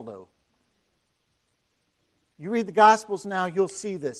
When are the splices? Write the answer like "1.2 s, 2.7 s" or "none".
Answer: none

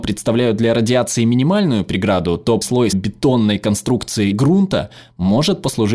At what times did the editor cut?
2.6 s, 2.9 s, 4.3 s

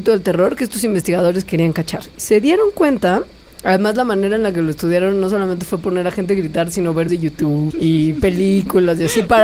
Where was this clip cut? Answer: 7.1 s, 7.7 s

